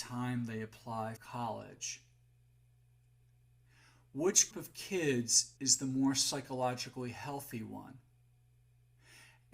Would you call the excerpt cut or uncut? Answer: cut